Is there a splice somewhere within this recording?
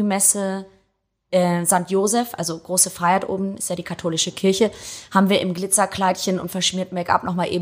no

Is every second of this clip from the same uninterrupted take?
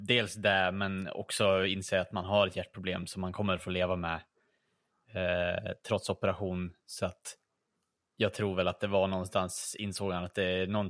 yes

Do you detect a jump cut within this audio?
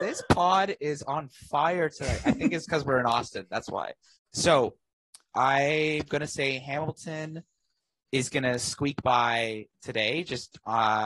no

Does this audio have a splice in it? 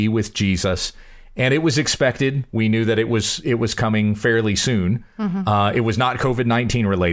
no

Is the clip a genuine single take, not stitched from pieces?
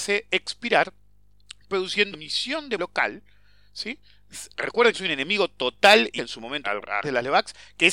no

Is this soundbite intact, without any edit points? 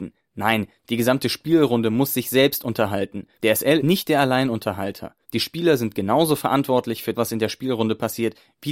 no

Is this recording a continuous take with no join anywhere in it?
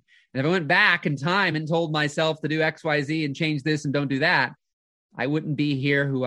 yes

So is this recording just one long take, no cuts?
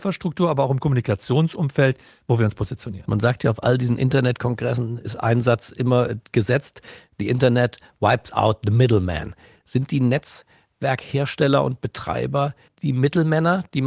yes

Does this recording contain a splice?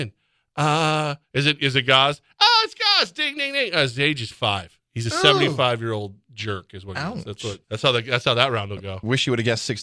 yes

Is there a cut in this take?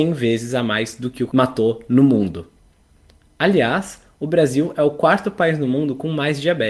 yes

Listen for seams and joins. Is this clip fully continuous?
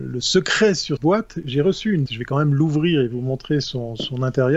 no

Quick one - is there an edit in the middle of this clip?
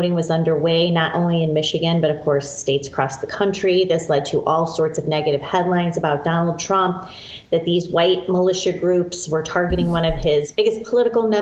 no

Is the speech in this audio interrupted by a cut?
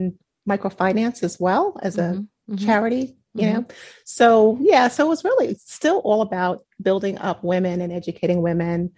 no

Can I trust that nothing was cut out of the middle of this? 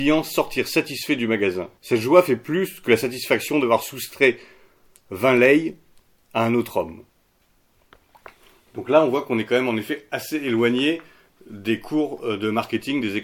no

